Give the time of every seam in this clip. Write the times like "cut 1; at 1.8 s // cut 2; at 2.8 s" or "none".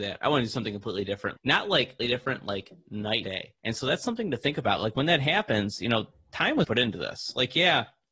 cut 1; at 1.4 s // cut 2; at 2.0 s // cut 3; at 3.2 s // cut 4; at 3.6 s // cut 5; at 6.6 s